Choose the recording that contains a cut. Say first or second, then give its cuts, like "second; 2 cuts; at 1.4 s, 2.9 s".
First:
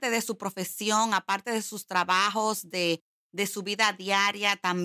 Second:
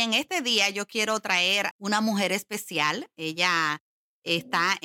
second; 1 cut; at 1.7 s